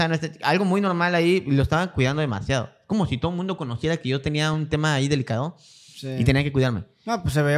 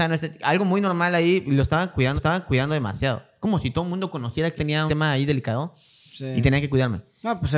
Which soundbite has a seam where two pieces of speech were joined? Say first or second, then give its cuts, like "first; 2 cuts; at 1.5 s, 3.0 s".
second; 3 cuts; at 2.2 s, 4.6 s, 4.9 s